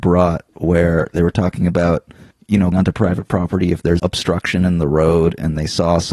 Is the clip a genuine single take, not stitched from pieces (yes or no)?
no